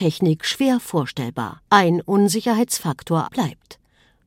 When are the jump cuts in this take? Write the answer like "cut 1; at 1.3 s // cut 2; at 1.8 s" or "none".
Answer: cut 1; at 1.7 s // cut 2; at 3.3 s

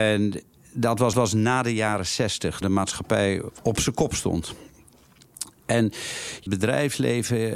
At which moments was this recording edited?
cut 1; at 1.1 s // cut 2; at 2.6 s // cut 3; at 6.5 s

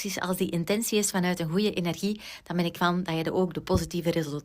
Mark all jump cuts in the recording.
cut 1; at 2.8 s

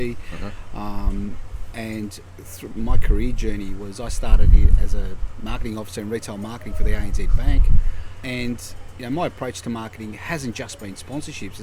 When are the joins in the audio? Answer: cut 1; at 2.7 s

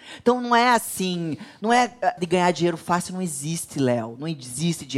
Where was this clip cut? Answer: cut 1; at 2.2 s

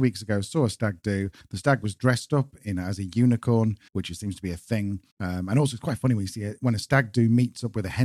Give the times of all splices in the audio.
cut 1; at 3.9 s // cut 2; at 5.1 s

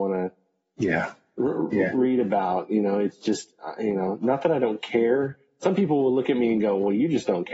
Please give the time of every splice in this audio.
none

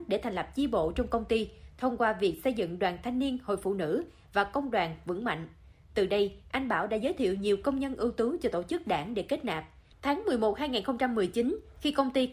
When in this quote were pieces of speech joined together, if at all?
none

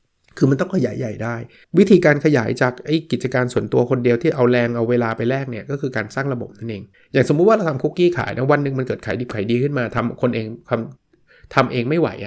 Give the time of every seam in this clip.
cut 1; at 1.6 s // cut 2; at 6.9 s // cut 3; at 11.0 s

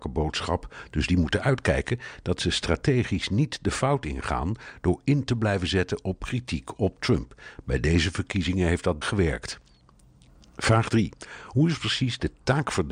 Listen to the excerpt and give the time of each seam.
cut 1; at 9.0 s

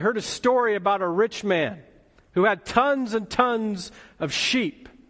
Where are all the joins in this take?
none

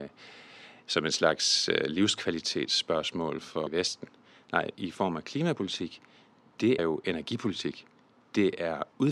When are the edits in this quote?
cut 1; at 3.7 s // cut 2; at 4.7 s // cut 3; at 6.8 s

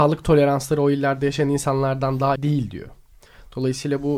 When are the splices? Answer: cut 1; at 2.4 s

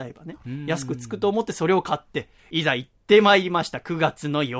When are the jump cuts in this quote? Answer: cut 1; at 2.4 s

